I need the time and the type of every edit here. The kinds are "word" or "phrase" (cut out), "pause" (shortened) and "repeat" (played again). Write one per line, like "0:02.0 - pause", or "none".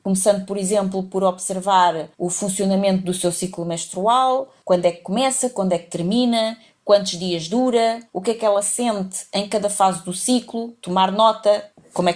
none